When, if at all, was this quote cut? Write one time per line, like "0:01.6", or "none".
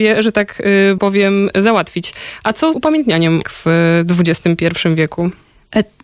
0:01.0
0:02.7
0:03.4